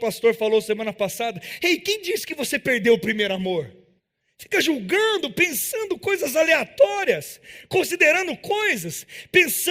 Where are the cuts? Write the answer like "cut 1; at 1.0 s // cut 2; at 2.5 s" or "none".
cut 1; at 4.0 s